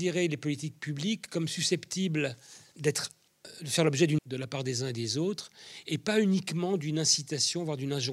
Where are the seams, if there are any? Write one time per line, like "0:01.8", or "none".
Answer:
0:04.2